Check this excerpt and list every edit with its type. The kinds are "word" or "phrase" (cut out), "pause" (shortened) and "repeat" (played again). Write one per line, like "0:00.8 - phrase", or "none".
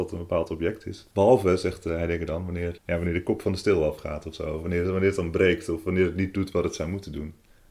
0:01.1 - pause
0:02.8 - word